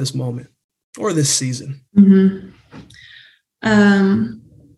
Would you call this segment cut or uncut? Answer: cut